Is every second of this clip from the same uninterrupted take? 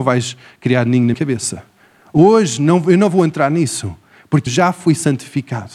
no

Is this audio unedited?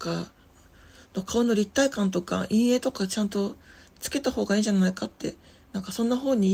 yes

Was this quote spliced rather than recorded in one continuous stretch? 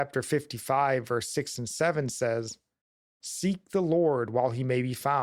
no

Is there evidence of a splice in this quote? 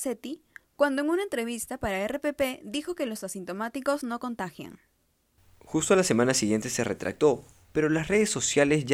no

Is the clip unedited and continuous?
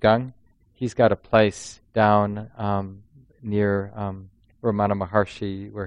yes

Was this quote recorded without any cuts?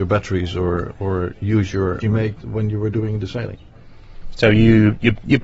no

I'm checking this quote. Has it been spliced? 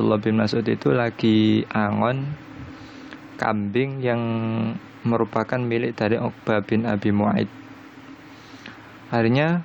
no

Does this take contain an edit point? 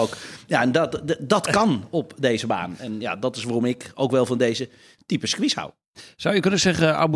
no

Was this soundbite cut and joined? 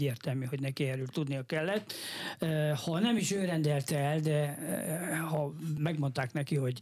no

